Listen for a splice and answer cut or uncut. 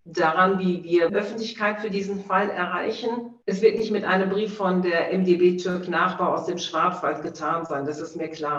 cut